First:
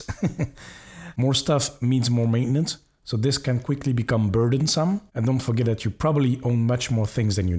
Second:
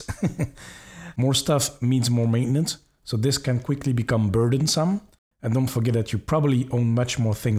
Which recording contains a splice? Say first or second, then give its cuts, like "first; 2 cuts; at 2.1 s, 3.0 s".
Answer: first; 1 cut; at 5.1 s